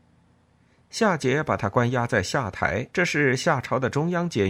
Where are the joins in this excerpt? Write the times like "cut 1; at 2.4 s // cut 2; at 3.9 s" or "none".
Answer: cut 1; at 2.9 s

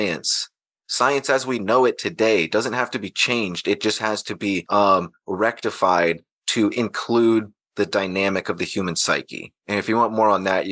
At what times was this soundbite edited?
none

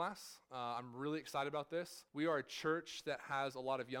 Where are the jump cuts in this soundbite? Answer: cut 1; at 2.1 s

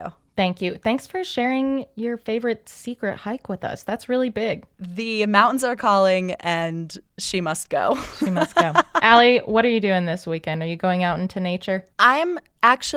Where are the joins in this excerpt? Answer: cut 1; at 11.9 s

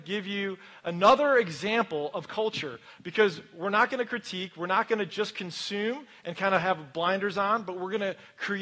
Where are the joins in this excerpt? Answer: cut 1; at 2.3 s

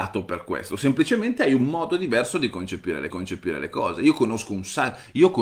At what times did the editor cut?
cut 1; at 3.1 s

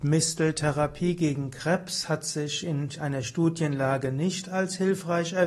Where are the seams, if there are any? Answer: none

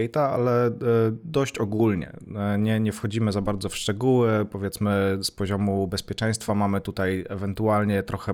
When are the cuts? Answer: none

